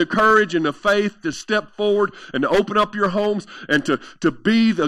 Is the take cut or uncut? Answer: uncut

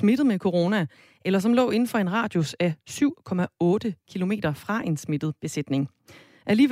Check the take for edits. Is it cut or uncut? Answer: uncut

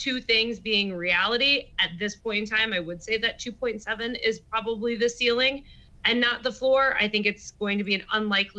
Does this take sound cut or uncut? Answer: uncut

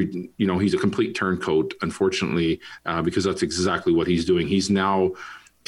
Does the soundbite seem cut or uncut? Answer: uncut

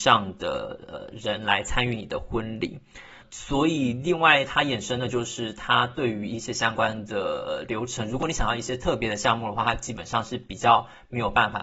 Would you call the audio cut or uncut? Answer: uncut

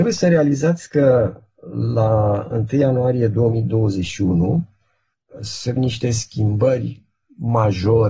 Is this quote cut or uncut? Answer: cut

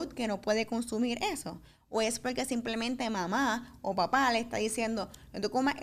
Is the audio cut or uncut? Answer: uncut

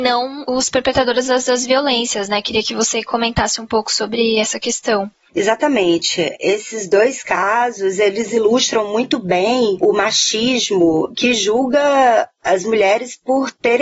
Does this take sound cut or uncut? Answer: uncut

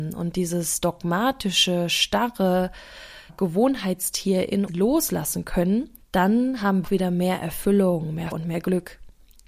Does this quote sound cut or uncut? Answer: cut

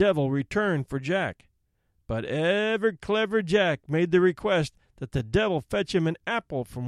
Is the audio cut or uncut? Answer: uncut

